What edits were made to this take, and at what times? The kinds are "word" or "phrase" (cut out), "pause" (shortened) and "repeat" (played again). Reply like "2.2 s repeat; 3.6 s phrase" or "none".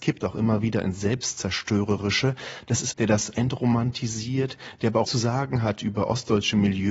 2.9 s phrase; 3.3 s word; 5.0 s word